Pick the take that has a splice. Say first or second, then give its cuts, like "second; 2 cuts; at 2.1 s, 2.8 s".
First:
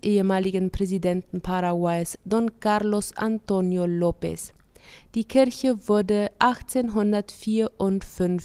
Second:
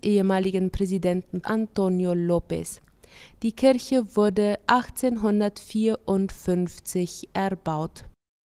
second; 1 cut; at 1.4 s